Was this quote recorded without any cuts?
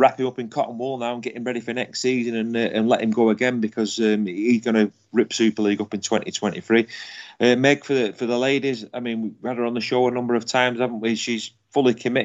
yes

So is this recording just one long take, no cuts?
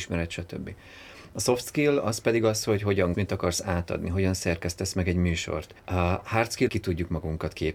no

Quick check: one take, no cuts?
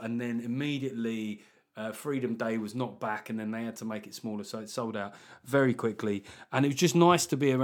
yes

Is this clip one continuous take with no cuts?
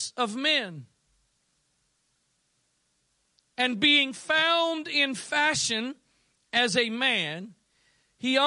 yes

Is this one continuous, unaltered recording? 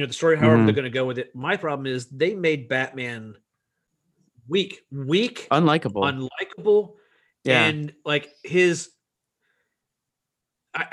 yes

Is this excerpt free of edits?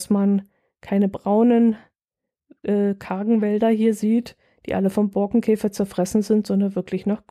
yes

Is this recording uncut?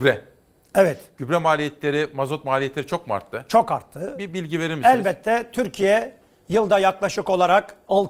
yes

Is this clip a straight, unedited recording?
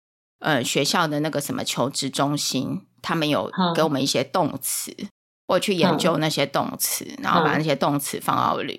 yes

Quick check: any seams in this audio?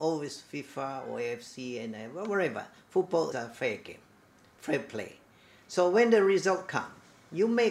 yes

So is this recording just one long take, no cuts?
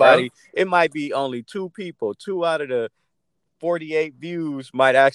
yes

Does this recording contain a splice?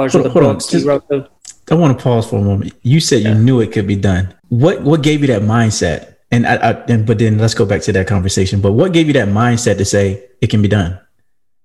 yes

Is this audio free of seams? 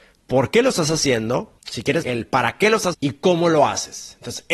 no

